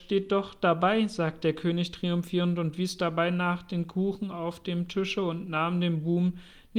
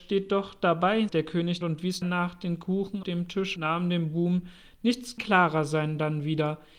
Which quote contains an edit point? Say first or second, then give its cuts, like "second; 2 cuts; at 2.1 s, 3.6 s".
second; 6 cuts; at 1.1 s, 1.6 s, 2.0 s, 3.0 s, 3.6 s, 5.2 s